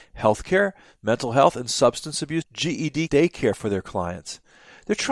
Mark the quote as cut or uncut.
cut